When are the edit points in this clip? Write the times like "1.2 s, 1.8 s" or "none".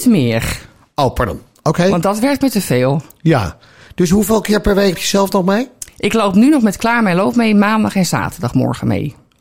4.9 s

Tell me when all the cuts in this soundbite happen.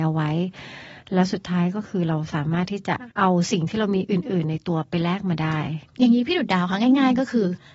3.1 s

